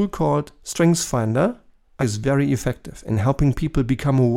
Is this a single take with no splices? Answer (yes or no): no